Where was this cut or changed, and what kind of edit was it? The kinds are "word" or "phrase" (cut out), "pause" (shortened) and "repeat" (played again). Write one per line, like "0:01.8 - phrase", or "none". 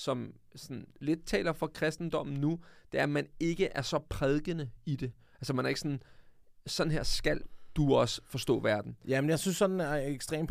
none